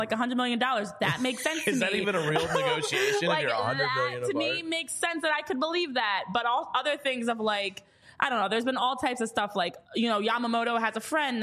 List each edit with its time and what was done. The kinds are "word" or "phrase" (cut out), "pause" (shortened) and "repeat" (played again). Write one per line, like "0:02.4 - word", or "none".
0:09.8 - pause